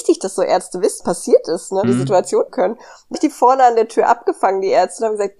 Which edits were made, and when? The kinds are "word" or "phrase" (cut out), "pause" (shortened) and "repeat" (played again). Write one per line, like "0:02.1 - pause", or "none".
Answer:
0:01.0 - word
0:01.8 - word
0:02.5 - phrase
0:03.1 - word